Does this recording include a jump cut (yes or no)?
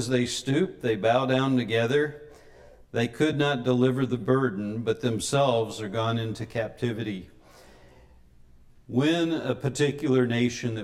no